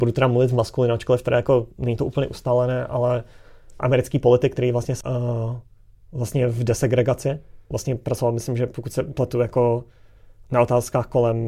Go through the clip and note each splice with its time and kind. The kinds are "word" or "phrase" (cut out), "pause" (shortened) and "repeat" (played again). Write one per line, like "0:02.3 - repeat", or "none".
0:01.7 - pause
0:03.8 - word
0:05.0 - phrase
0:07.7 - word